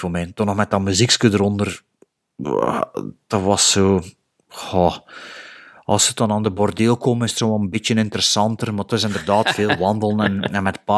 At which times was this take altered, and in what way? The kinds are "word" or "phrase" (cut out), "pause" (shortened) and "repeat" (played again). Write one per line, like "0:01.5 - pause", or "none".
none